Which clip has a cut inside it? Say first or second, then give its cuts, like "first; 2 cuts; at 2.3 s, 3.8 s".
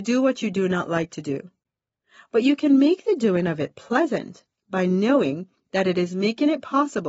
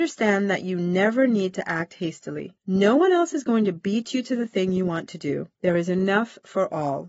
second; 2 cuts; at 2.6 s, 5.5 s